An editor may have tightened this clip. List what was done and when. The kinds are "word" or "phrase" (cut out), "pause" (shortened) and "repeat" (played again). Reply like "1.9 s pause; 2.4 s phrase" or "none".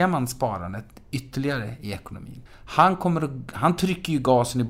2.5 s pause